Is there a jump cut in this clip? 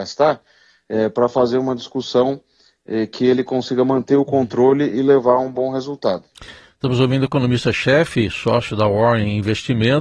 no; 0 cuts

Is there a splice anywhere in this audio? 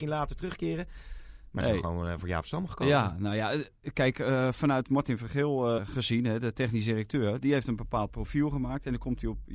yes; 1 cut; at 5.8 s

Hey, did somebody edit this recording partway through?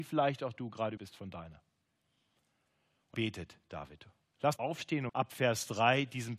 yes; 4 cuts; at 1.0 s, 3.1 s, 4.6 s, 5.1 s

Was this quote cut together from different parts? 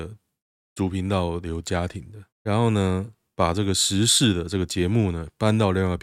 yes; 1 cut; at 2.3 s

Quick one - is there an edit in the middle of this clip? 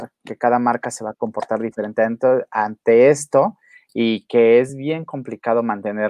no; 0 cuts

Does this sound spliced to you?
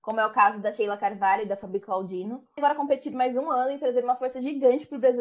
yes; 1 cut; at 2.6 s

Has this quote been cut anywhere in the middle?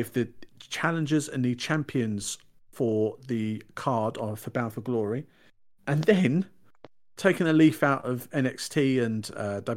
no; 0 cuts

